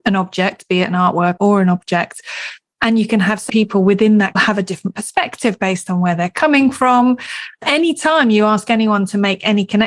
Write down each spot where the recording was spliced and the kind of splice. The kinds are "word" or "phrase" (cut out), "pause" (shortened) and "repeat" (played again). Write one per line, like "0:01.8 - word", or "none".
0:01.4 - word
0:03.5 - word
0:04.4 - phrase